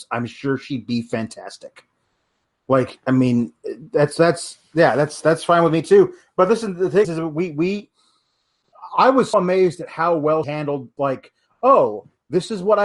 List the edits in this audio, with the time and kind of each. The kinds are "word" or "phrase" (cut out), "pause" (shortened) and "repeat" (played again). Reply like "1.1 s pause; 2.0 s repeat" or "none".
7.0 s word; 9.3 s word; 10.4 s word